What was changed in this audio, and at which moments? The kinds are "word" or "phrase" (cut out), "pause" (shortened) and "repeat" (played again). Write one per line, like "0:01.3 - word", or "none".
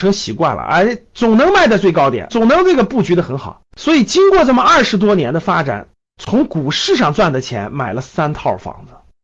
0:02.3 - word
0:03.7 - pause